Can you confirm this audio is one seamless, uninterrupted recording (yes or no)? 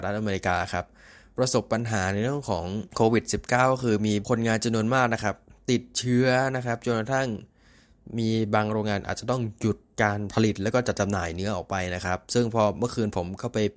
yes